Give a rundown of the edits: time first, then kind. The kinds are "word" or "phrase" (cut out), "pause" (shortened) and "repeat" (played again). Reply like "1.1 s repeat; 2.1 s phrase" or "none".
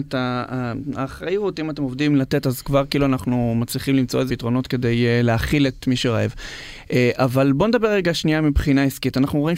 4.3 s word